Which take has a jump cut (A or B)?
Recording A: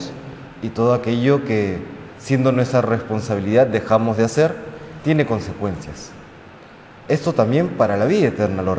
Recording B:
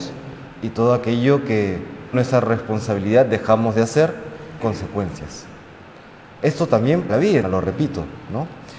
B